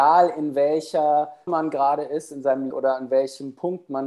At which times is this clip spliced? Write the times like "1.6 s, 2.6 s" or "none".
1.5 s, 2.7 s

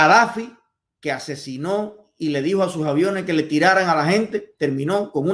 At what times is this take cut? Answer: none

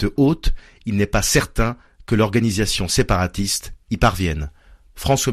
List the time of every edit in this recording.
none

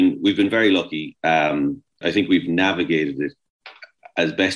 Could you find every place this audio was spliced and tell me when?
2.0 s

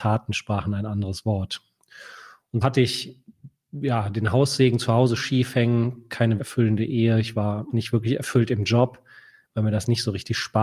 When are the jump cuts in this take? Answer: 2.6 s, 5.2 s, 6.4 s, 7.7 s

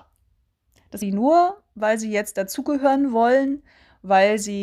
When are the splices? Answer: 1.0 s

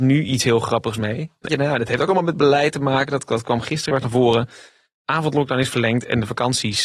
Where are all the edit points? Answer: 1.5 s, 3.9 s

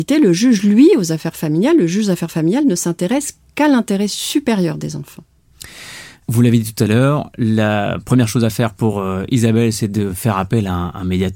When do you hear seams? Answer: none

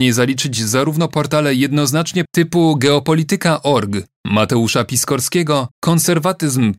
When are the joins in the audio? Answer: 2.3 s, 5.7 s

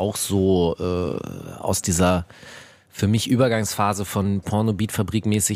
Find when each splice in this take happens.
4.4 s

